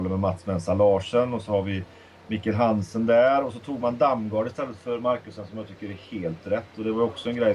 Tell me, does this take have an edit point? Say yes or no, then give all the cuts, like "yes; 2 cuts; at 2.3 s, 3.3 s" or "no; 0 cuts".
no; 0 cuts